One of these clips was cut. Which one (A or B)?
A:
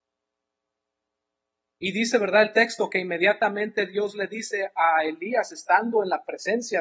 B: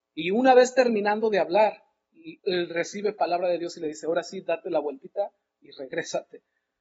B